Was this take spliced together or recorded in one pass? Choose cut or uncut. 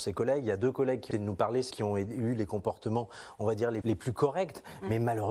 cut